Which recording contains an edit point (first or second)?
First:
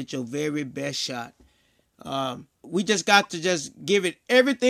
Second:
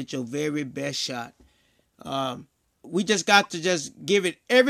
first